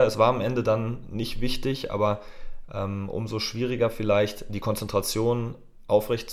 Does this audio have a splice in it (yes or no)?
no